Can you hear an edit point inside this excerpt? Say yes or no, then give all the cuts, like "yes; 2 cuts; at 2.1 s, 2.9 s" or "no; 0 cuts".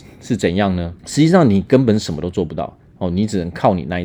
yes; 1 cut; at 1.0 s